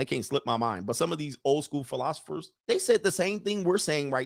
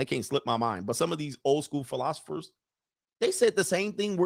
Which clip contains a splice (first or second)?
first